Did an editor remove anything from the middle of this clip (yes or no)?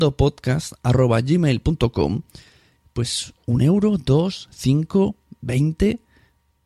no